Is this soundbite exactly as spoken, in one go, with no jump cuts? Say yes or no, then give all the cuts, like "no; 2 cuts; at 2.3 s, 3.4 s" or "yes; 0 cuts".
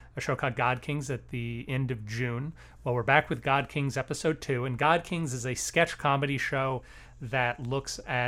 yes; 0 cuts